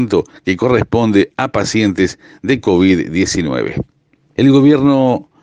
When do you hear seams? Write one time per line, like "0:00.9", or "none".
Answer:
none

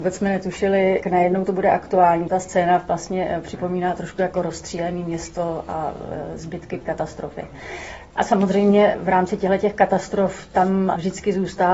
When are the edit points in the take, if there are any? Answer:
0:01.0
0:02.3
0:06.8

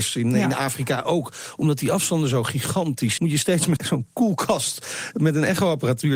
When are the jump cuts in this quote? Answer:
0:03.2
0:03.8

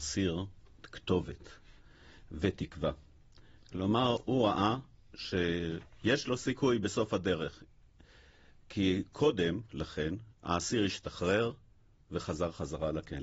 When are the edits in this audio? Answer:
none

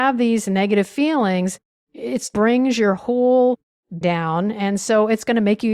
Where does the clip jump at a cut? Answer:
0:02.3
0:04.0

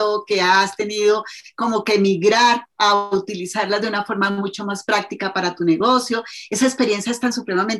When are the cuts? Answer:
none

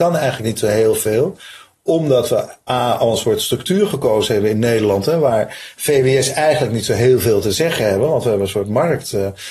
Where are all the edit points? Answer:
none

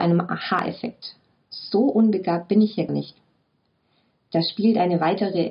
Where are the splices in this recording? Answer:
0:02.9

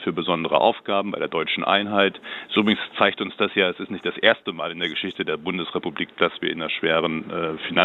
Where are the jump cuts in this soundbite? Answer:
none

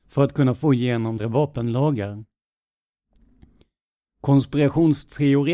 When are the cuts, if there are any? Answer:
0:01.2

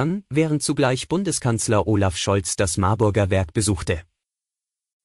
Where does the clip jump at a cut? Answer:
none

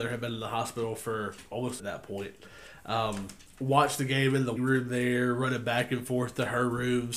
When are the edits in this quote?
0:01.8
0:03.5
0:04.6

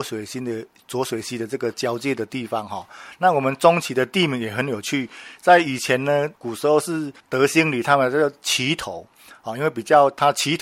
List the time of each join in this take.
0:06.3
0:07.2

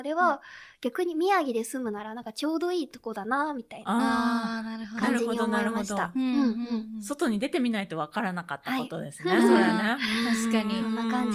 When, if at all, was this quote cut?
none

